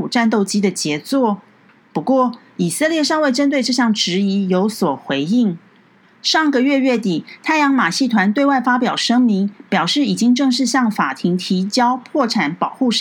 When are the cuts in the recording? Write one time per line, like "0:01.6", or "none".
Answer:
none